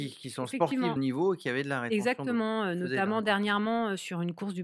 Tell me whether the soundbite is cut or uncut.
cut